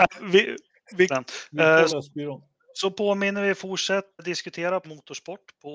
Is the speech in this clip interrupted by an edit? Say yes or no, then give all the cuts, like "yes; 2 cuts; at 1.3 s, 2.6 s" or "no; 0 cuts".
yes; 4 cuts; at 1.1 s, 1.9 s, 4.2 s, 4.8 s